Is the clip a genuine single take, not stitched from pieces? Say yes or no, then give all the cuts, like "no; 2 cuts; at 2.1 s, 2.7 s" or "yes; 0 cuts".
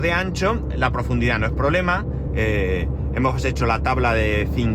yes; 0 cuts